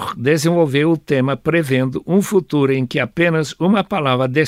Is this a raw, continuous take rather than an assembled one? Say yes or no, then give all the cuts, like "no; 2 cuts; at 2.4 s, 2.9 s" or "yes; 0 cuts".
yes; 0 cuts